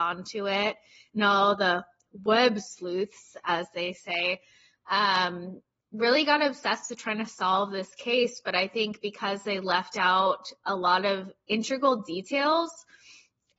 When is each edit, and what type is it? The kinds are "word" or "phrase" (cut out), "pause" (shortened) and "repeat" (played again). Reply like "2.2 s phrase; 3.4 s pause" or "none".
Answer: none